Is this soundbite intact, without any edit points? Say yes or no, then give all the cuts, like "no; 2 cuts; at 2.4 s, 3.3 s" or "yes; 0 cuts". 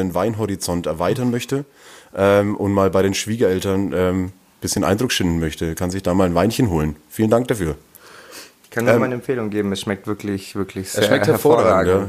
yes; 0 cuts